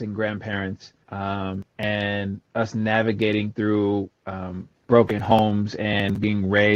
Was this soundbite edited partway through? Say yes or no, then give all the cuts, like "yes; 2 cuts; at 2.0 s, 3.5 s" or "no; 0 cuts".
yes; 2 cuts; at 1.0 s, 4.8 s